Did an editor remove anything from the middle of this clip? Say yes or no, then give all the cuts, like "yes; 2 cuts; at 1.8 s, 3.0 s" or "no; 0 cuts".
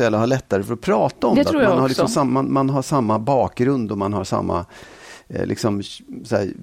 no; 0 cuts